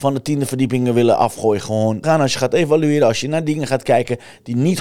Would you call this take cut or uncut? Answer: cut